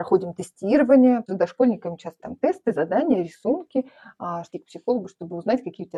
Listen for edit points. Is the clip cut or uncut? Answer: cut